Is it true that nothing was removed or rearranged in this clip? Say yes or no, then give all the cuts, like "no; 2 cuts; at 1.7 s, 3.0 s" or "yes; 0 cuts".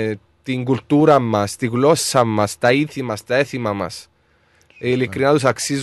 yes; 0 cuts